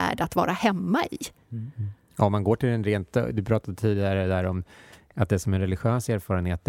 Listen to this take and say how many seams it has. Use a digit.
0